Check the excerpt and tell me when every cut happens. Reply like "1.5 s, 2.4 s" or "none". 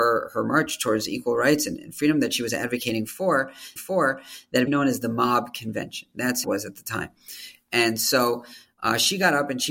3.8 s, 4.7 s, 6.4 s